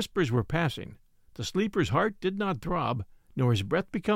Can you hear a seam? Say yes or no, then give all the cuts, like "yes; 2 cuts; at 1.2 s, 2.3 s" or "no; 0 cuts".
no; 0 cuts